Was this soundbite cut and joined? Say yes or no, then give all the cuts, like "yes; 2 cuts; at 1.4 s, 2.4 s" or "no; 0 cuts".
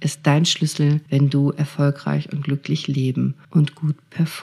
yes; 2 cuts; at 1.1 s, 3.4 s